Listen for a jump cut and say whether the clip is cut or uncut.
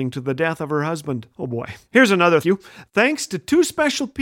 cut